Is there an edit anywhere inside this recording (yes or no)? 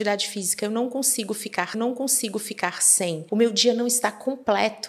yes